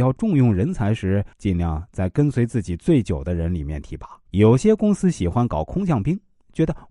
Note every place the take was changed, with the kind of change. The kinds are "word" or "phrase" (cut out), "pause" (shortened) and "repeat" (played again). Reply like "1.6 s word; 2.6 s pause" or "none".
1.3 s pause; 4.3 s pause